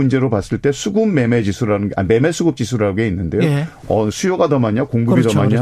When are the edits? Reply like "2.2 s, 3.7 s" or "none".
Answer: none